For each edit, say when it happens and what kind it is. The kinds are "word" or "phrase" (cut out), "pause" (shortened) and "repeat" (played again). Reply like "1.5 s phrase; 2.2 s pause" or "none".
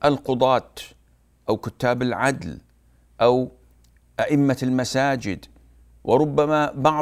none